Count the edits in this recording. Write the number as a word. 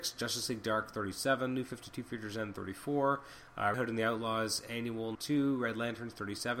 two